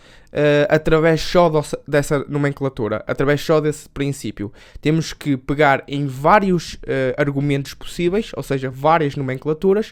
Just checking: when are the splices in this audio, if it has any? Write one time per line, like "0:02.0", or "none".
none